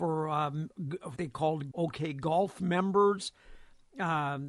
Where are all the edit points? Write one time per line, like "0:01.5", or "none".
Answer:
0:01.2
0:01.7